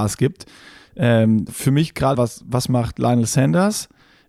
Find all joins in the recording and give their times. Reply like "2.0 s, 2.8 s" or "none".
1.5 s, 2.1 s

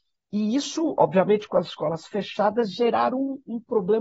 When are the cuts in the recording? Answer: none

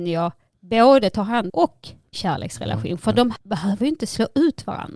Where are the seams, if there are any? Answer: 1.5 s, 2.1 s, 3.4 s

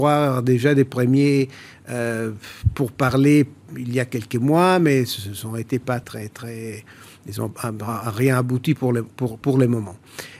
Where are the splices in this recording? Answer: 6.0 s, 9.4 s

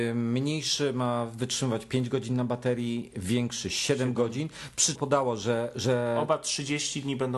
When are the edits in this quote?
5.0 s

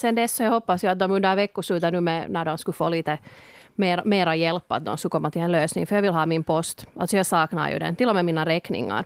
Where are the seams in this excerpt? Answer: none

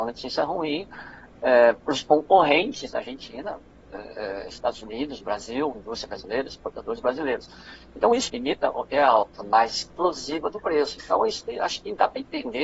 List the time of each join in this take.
2.9 s, 5.7 s, 8.3 s, 9.4 s

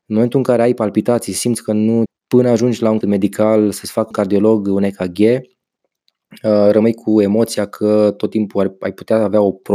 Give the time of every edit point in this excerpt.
2.1 s, 3.0 s, 4.1 s

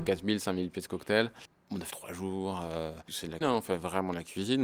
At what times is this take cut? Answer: 1.9 s, 3.4 s

